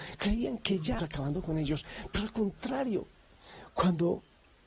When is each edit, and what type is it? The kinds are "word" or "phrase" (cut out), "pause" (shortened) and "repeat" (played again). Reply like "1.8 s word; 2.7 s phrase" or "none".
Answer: 1.0 s phrase